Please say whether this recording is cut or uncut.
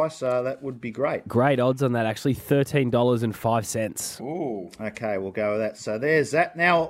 uncut